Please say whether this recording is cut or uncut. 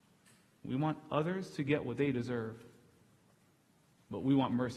uncut